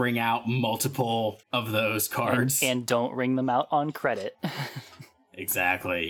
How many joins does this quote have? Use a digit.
1